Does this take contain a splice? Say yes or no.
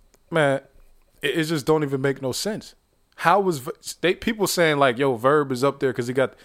no